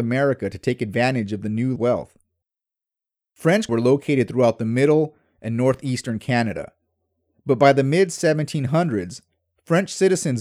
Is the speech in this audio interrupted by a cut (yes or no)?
yes